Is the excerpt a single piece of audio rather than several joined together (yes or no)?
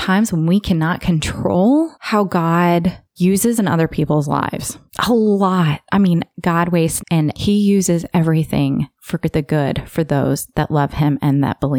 no